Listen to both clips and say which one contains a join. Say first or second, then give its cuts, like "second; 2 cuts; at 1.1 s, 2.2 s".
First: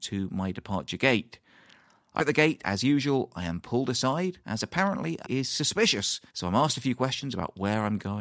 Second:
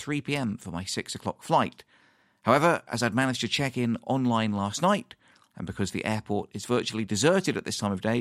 first; 5 cuts; at 2.2 s, 2.6 s, 4.4 s, 5.2 s, 6.3 s